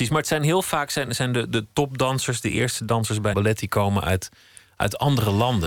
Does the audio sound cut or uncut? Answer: cut